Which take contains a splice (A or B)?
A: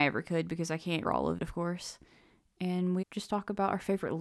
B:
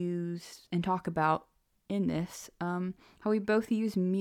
A